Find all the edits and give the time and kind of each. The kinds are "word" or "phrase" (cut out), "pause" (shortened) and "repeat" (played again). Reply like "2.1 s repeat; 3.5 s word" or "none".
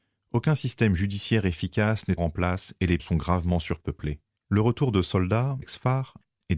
2.2 s word; 3.0 s word; 4.4 s pause; 5.6 s word